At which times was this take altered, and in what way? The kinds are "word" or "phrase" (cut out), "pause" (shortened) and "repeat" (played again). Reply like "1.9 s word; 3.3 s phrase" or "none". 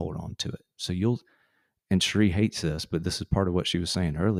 none

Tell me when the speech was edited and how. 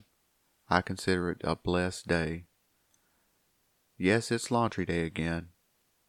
none

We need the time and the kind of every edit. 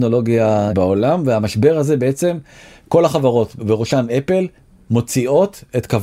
none

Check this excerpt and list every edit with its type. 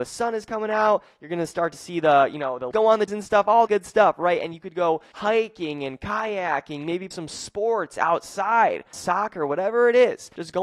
2.7 s word; 3.1 s word; 3.7 s word; 7.1 s word; 8.9 s word

